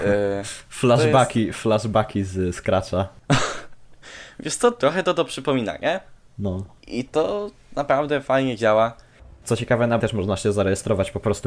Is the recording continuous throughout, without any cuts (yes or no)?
no